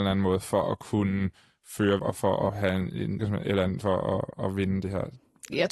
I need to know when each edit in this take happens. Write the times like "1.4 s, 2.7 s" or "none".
2.0 s, 2.5 s, 3.2 s, 3.8 s